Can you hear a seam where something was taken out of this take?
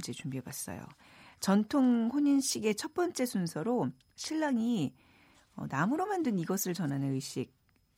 no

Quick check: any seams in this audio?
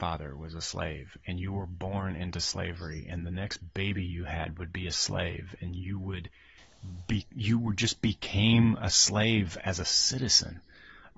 no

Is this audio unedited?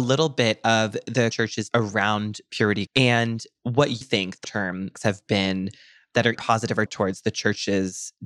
no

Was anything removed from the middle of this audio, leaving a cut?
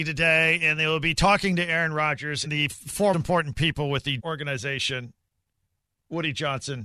yes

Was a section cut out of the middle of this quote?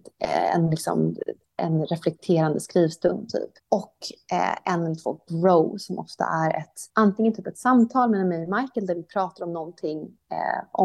yes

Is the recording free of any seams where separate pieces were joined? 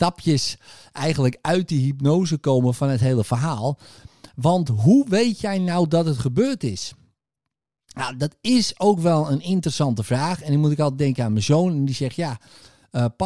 yes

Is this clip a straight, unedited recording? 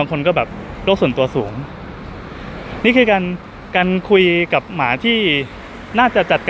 no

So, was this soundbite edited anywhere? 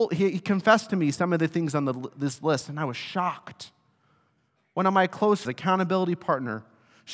yes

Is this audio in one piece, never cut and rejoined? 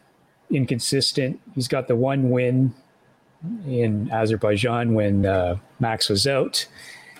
yes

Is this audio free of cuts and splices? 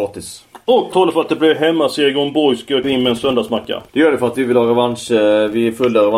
no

